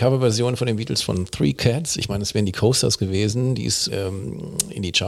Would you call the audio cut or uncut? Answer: cut